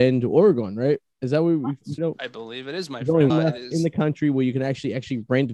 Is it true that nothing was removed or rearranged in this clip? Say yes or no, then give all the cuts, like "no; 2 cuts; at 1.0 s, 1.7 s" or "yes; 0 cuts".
no; 2 cuts; at 2.0 s, 3.3 s